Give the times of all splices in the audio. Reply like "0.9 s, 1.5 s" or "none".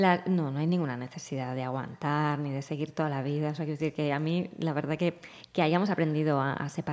none

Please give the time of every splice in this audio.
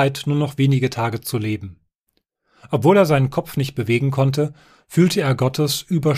none

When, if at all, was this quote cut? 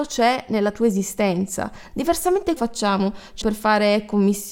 2.6 s, 3.4 s

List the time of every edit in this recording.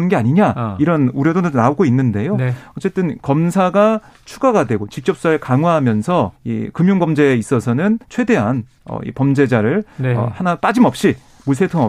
6.4 s, 8.0 s

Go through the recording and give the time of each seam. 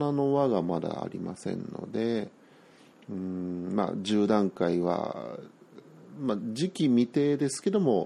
none

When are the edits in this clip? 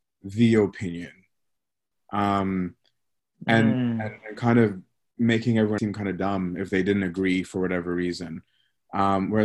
5.8 s

